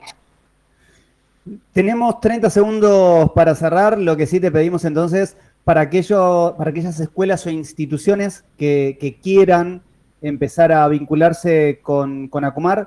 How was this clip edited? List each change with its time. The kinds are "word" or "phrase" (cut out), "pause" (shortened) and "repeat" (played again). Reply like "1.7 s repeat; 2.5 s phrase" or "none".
none